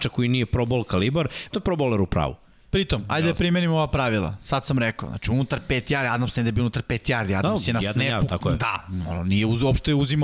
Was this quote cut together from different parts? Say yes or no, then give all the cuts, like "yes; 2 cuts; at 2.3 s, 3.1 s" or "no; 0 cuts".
yes; 1 cut; at 1.5 s